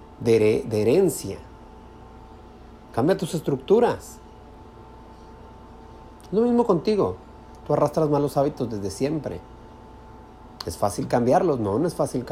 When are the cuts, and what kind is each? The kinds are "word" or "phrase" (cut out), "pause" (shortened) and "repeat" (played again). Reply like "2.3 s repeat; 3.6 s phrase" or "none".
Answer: 2.8 s pause

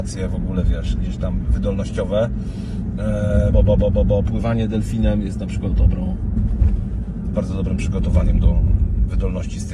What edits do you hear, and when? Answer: 3.5 s word; 5.7 s word

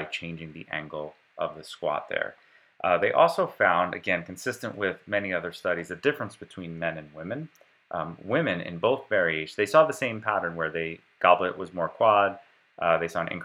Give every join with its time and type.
none

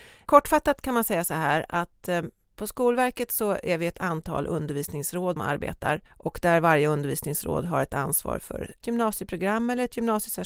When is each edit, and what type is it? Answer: 5.4 s word; 6.1 s pause; 8.8 s word

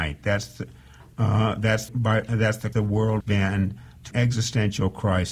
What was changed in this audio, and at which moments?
1.9 s word; 2.7 s word; 3.2 s word; 4.1 s word

